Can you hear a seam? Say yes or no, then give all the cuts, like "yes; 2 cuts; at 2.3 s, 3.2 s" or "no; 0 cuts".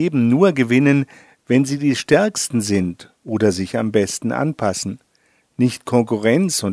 no; 0 cuts